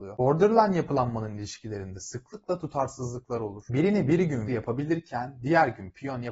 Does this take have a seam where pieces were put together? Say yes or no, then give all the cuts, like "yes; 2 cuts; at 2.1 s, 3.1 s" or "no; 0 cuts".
yes; 1 cut; at 4.5 s